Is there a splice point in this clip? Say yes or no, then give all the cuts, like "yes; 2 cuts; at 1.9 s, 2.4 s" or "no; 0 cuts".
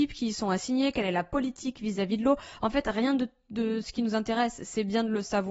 no; 0 cuts